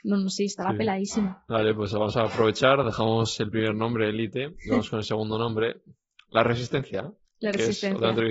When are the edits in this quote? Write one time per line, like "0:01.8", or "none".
none

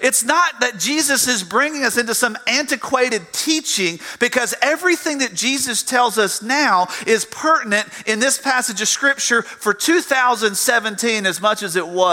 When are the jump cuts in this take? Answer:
none

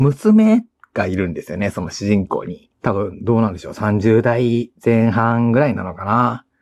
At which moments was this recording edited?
0:02.7

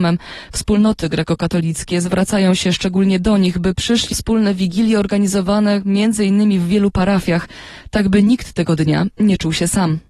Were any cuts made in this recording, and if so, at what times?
0:04.1

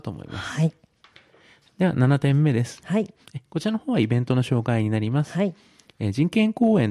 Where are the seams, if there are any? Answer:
none

